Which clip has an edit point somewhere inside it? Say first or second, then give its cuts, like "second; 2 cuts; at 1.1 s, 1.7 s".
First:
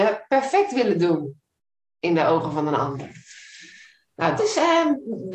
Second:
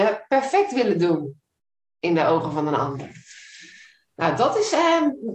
first; 1 cut; at 4.4 s